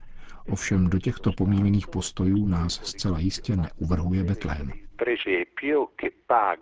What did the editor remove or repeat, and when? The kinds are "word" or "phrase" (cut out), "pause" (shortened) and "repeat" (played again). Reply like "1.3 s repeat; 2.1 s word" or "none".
none

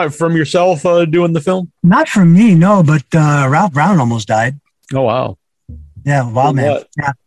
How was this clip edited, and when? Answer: 1.8 s pause; 4.7 s pause

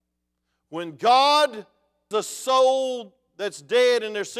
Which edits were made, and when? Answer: 2.1 s word

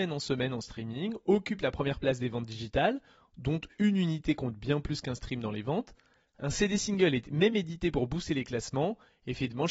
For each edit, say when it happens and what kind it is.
none

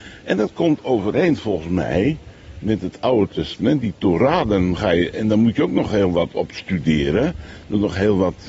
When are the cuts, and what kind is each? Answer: none

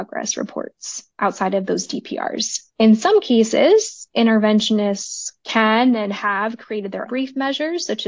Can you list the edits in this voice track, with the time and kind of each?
2.7 s pause; 5.4 s pause; 7.1 s word

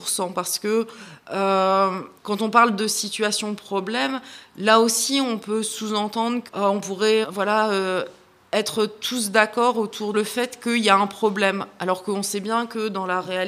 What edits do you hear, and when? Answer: 2.2 s pause; 6.5 s word; 7.2 s word; 10.1 s phrase

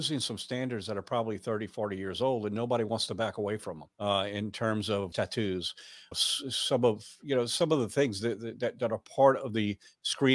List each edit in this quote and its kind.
3.9 s pause; 5.1 s phrase; 6.1 s phrase

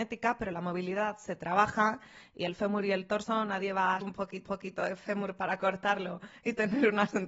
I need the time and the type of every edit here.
4.0 s word; 4.4 s repeat

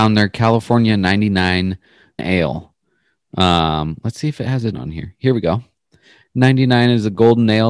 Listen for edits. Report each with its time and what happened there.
2.2 s word; 4.7 s word

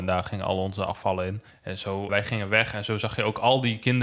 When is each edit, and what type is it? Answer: 1.5 s pause; 2.1 s word

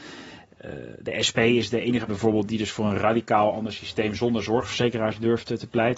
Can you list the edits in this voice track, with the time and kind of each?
2.1 s word

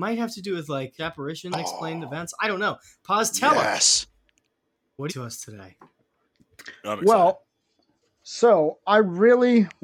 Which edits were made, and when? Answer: 1.0 s phrase; 1.5 s phrase; 5.1 s phrase

